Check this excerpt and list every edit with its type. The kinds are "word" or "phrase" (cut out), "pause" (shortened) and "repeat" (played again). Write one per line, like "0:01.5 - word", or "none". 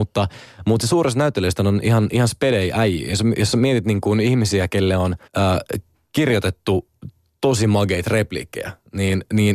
0:05.3 - pause